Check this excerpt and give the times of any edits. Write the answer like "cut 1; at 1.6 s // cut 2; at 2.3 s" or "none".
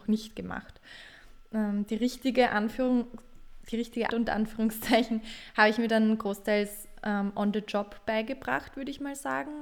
cut 1; at 4.1 s